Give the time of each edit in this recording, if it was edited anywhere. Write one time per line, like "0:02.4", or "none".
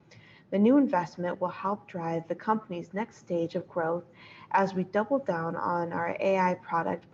none